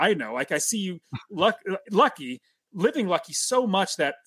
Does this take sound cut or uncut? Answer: uncut